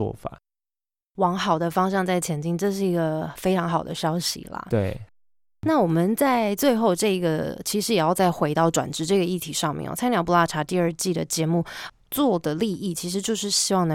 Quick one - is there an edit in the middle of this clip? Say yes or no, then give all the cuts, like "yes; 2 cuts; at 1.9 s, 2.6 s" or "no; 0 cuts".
no; 0 cuts